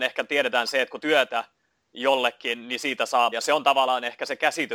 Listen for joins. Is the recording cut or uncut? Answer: cut